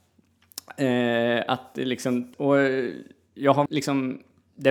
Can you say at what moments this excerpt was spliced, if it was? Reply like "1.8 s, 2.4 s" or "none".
2.3 s, 3.7 s